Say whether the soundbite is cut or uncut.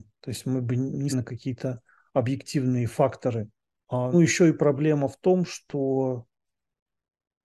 cut